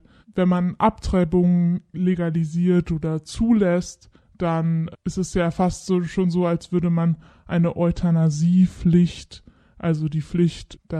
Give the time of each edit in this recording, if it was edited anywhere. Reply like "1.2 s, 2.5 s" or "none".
none